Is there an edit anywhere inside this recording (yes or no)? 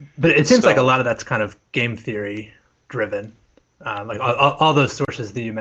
no